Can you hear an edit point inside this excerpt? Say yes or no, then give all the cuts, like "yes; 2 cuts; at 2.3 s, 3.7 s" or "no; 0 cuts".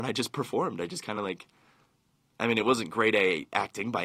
no; 0 cuts